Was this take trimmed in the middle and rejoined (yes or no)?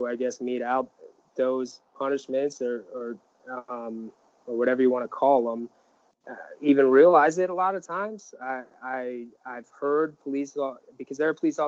no